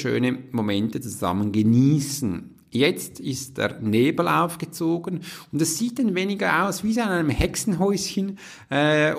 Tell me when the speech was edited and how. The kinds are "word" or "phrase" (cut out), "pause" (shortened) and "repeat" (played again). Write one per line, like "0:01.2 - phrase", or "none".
none